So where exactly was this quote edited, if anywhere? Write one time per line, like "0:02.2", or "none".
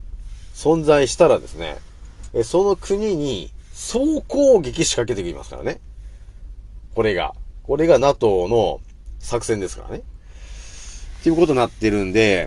none